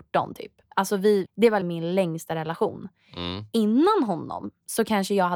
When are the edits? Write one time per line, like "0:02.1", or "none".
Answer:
0:01.3
0:01.6